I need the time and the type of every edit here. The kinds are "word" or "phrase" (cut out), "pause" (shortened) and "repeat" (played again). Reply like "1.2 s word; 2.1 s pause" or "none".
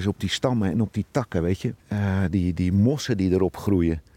1.8 s pause